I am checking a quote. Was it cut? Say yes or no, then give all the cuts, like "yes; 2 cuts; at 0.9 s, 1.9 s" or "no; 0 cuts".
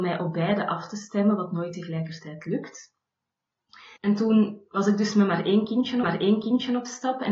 yes; 2 cuts; at 4.0 s, 6.0 s